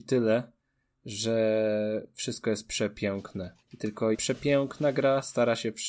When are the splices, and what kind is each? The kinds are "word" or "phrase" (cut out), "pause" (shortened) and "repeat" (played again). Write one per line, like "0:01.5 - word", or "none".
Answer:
0:03.6 - pause
0:04.1 - word